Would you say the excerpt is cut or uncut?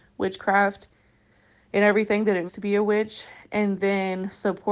cut